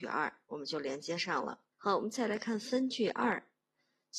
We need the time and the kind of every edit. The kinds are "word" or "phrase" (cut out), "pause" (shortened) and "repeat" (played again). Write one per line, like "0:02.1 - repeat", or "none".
0:01.7 - pause